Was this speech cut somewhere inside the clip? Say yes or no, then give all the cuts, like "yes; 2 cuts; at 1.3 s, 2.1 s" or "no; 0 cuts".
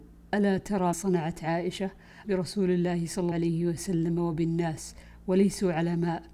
yes; 3 cuts; at 0.9 s, 2.2 s, 3.3 s